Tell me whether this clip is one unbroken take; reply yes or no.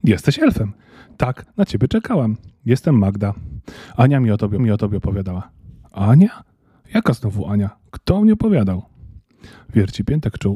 no